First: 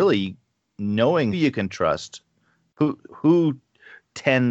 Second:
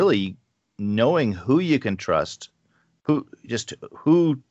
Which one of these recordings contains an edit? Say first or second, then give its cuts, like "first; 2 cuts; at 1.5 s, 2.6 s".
first; 2 cuts; at 1.3 s, 3.1 s